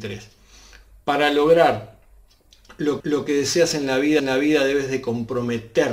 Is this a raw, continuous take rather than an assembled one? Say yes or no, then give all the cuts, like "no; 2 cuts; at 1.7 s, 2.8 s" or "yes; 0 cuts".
no; 2 cuts; at 3.0 s, 4.2 s